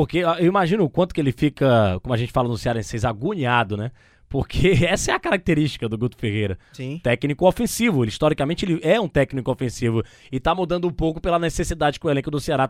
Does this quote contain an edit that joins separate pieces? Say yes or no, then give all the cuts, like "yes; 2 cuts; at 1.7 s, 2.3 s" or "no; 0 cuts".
no; 0 cuts